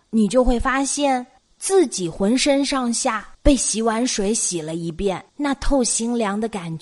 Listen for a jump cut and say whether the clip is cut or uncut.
cut